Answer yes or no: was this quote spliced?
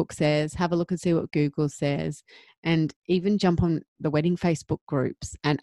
no